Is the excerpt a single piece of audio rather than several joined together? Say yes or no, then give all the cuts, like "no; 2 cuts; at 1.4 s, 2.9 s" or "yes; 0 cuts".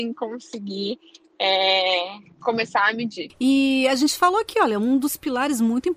yes; 0 cuts